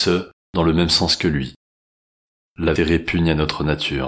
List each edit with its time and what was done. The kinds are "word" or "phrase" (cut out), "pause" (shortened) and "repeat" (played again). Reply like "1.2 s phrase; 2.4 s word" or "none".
2.8 s word